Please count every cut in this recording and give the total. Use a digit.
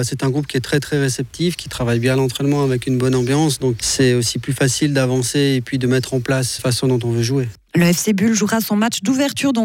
2